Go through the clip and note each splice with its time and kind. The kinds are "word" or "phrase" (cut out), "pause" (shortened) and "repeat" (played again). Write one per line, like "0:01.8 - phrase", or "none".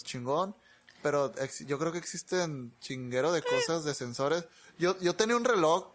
none